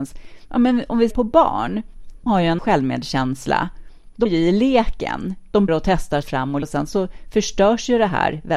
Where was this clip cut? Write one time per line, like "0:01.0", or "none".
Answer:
0:01.1
0:02.3
0:02.6
0:04.3
0:05.7
0:06.2
0:06.6